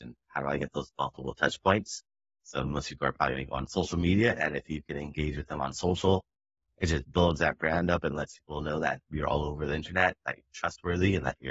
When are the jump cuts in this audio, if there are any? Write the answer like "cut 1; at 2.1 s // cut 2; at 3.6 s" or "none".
none